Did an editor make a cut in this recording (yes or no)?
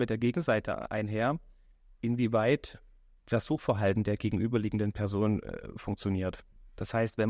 no